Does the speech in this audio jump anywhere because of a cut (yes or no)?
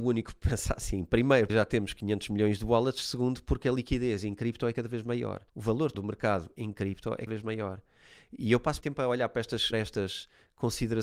yes